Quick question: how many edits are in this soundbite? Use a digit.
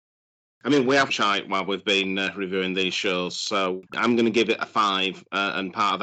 2